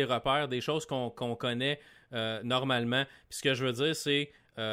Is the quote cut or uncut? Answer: uncut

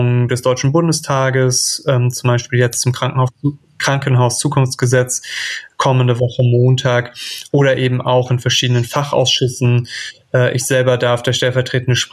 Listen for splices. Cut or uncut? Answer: uncut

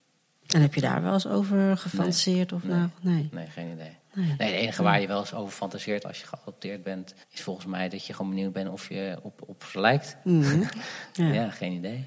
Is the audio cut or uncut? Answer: cut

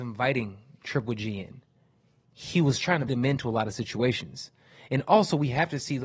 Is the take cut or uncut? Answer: cut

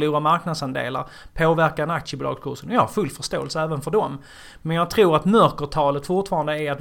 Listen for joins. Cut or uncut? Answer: uncut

